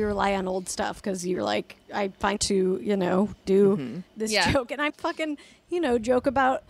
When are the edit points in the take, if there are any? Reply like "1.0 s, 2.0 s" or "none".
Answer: 2.4 s, 4.1 s, 4.9 s